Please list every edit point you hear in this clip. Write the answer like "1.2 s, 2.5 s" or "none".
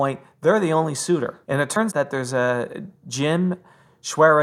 1.9 s